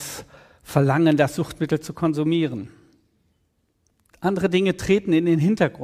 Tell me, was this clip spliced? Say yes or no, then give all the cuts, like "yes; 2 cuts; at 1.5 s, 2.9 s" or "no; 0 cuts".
no; 0 cuts